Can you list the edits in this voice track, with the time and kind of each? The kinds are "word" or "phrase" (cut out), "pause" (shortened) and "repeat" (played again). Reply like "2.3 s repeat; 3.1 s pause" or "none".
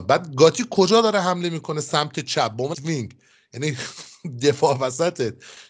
2.7 s word